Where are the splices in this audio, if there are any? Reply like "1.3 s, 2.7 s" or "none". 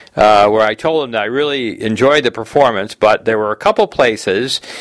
none